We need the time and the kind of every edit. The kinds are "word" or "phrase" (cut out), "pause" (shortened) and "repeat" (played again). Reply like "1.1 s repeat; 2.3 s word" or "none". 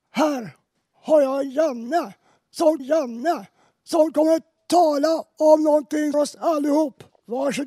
2.8 s repeat; 6.1 s phrase